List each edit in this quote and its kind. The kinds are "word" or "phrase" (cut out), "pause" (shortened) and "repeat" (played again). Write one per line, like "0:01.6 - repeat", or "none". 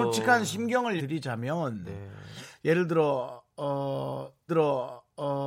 0:01.0 - word
0:04.5 - repeat